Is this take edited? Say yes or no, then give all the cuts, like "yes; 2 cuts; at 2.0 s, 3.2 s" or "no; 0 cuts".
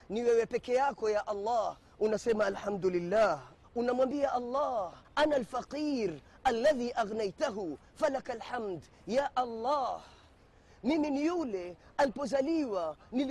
yes; 2 cuts; at 3.6 s, 5.0 s